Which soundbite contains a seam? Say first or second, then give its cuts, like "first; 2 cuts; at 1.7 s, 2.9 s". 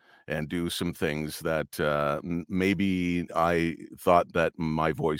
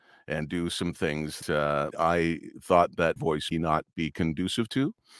second; 4 cuts; at 1.4 s, 1.9 s, 3.2 s, 3.5 s